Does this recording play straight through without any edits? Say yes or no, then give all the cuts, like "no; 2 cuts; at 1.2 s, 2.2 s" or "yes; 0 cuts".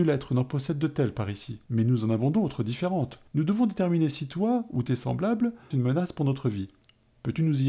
no; 3 cuts; at 1.6 s, 3.3 s, 5.7 s